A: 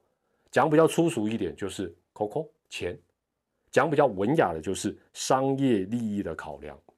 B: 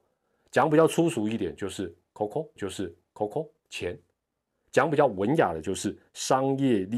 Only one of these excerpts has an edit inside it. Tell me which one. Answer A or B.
B